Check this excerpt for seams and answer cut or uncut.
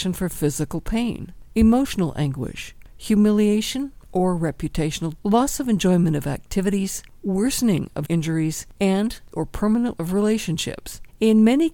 cut